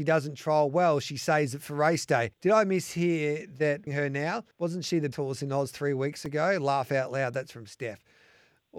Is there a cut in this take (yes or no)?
yes